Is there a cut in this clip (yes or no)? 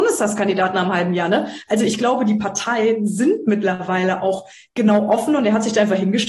no